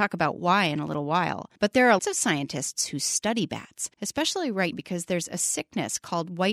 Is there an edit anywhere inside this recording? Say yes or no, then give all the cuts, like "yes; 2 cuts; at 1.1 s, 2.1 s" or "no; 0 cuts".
yes; 4 cuts; at 1.6 s, 2.0 s, 3.9 s, 4.7 s